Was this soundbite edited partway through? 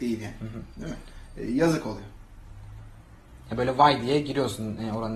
no; 0 cuts

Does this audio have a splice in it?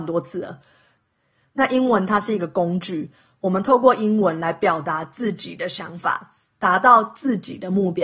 no; 0 cuts

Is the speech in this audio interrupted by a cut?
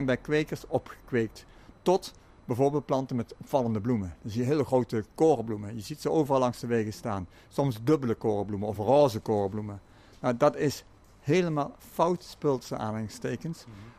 no; 0 cuts

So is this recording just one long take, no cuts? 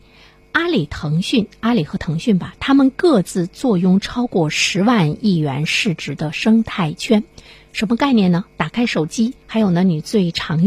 no; 1 cut; at 9.4 s

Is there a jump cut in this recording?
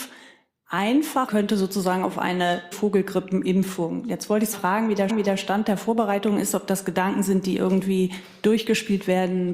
yes; 4 cuts; at 1.3 s, 2.7 s, 4.5 s, 5.1 s

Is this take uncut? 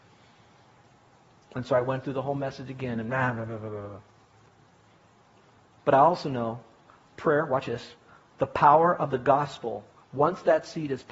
yes; 0 cuts

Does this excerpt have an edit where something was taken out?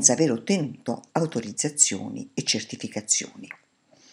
yes; 1 cut; at 1.1 s

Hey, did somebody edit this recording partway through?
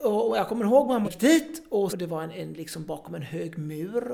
yes; 2 cuts; at 1.0 s, 1.9 s

